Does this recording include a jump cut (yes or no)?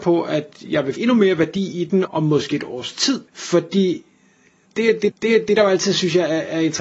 yes